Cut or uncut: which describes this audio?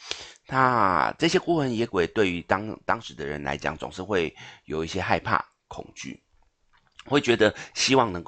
uncut